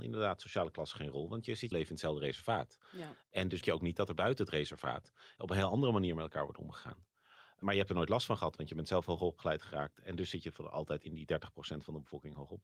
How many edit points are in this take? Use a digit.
2